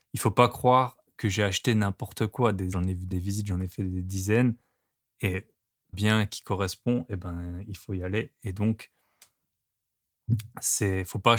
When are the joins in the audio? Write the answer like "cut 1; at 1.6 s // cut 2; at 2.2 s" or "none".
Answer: cut 1; at 2.7 s // cut 2; at 3.1 s // cut 3; at 5.9 s